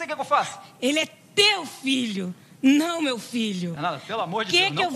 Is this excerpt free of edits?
yes; 0 cuts

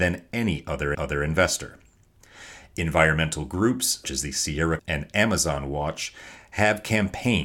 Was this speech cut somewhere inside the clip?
yes; 3 cuts; at 0.9 s, 4.0 s, 4.8 s

